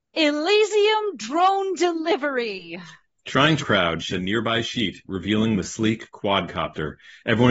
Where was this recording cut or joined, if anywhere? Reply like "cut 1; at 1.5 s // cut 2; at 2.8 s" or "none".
cut 1; at 3.6 s // cut 2; at 4.1 s